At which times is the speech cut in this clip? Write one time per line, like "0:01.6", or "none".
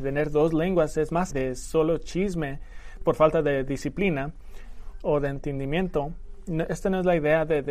0:01.3
0:05.0